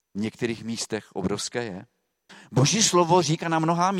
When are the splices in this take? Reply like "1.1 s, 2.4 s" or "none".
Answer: 2.3 s